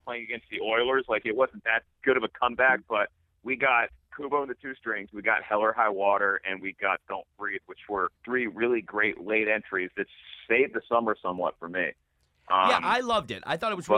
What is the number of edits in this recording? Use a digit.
1